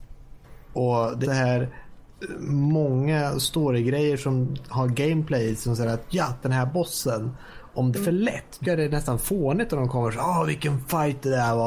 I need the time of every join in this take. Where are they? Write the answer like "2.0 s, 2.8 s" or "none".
1.2 s, 6.4 s, 7.9 s, 8.6 s